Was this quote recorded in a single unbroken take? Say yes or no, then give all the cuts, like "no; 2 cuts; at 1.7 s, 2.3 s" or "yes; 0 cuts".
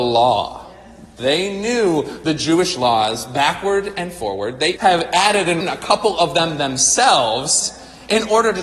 no; 2 cuts; at 4.8 s, 5.6 s